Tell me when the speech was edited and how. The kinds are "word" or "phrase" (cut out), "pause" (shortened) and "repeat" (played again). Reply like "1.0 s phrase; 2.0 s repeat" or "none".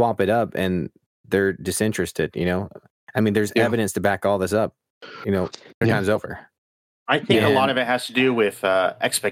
5.8 s word